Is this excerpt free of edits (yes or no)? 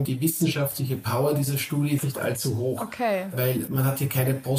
no